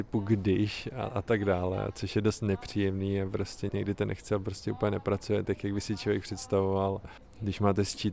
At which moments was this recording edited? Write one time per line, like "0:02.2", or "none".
none